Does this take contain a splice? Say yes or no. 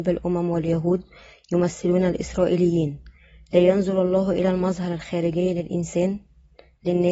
no